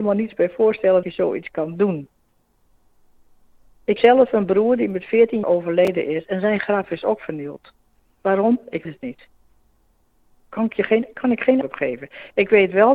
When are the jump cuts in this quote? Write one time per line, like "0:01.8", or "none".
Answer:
0:01.0
0:04.0
0:05.4
0:08.9
0:11.6